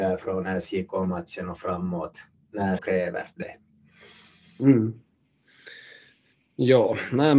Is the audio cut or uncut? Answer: cut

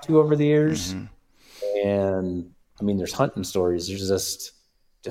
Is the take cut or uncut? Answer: cut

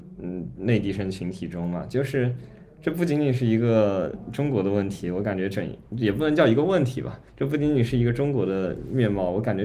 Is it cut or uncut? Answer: cut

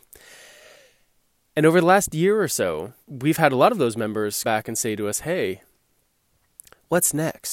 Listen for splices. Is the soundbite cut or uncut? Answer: cut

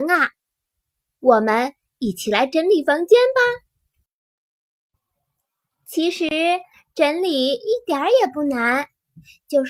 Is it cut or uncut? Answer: uncut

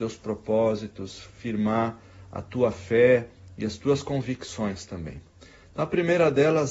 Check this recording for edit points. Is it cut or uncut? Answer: uncut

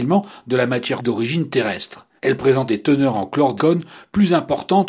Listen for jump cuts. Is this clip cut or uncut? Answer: cut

